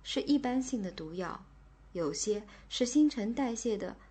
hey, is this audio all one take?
yes; 0 cuts

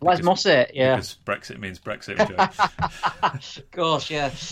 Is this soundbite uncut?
no; 1 cut; at 2.2 s

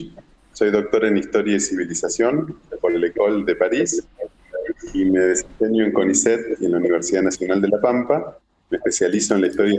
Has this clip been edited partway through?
no; 0 cuts

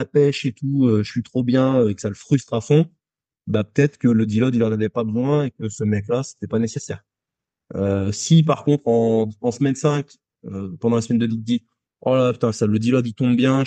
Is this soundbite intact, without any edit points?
no; 1 cut; at 11.3 s

